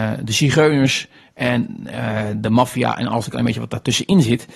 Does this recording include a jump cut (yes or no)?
no